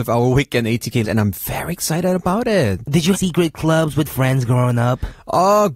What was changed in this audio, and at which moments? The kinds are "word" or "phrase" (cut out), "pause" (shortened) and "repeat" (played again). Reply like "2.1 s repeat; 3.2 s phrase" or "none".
1.0 s word; 3.1 s phrase; 4.1 s word